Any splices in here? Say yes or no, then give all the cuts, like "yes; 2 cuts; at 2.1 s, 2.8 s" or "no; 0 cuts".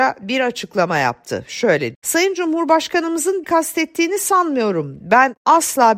yes; 2 cuts; at 1.9 s, 3.4 s